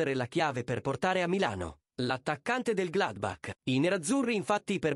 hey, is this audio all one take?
no; 1 cut; at 3.6 s

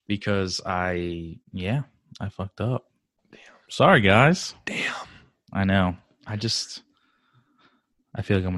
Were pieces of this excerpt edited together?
yes; 1 cut; at 1.4 s

